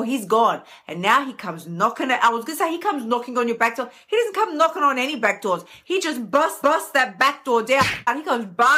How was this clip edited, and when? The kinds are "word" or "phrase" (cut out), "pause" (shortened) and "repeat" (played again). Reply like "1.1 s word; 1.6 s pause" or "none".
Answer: 6.6 s repeat